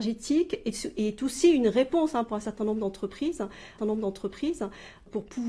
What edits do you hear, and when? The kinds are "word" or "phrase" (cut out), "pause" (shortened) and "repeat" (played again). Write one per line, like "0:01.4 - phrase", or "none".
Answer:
0:03.8 - repeat